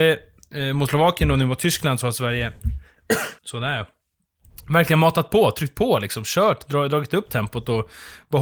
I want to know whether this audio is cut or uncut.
cut